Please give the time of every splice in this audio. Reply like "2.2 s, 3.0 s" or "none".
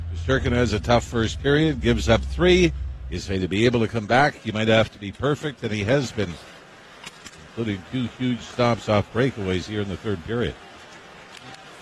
none